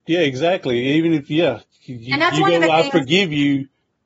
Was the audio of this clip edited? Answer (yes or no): no